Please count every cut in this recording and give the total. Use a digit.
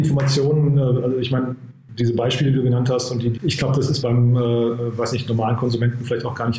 2